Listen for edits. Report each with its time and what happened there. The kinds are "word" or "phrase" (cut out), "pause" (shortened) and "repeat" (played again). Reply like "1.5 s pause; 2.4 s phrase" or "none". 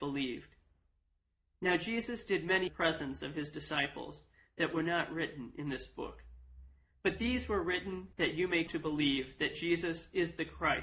2.7 s phrase; 8.1 s pause; 8.7 s word